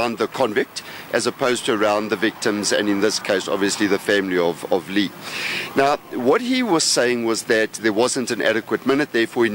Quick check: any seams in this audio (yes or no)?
no